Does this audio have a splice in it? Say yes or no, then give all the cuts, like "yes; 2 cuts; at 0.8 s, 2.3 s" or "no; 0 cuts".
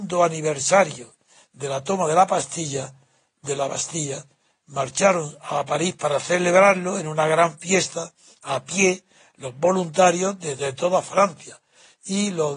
no; 0 cuts